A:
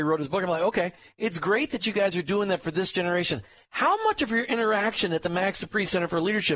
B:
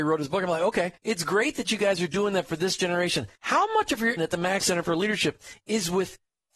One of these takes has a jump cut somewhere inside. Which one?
B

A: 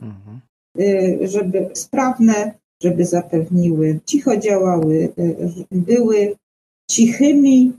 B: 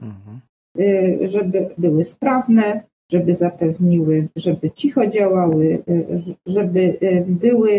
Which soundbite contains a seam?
A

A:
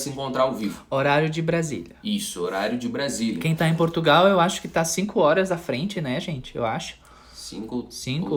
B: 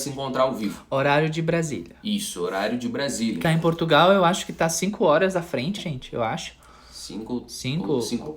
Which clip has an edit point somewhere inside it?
B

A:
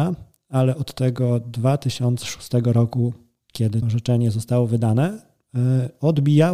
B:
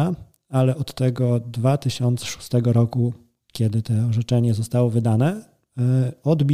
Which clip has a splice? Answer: A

